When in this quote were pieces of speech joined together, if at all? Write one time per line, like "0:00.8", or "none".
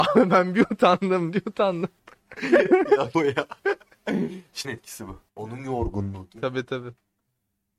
0:02.0
0:03.1
0:04.6
0:05.3